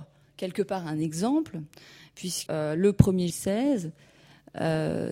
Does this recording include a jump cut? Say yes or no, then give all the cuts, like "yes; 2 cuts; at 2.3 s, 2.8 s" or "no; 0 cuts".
yes; 2 cuts; at 2.5 s, 3.3 s